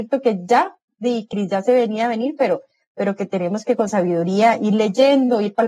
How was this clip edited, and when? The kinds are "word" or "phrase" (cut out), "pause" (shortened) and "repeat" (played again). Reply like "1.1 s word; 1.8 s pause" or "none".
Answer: none